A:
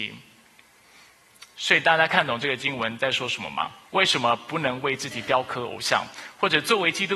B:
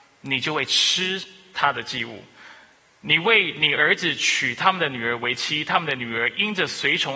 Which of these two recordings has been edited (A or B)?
A